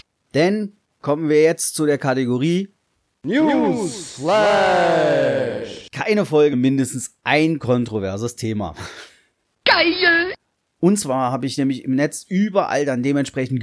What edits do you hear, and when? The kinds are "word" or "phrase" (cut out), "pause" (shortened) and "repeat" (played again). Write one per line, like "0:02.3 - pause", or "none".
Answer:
0:06.5 - word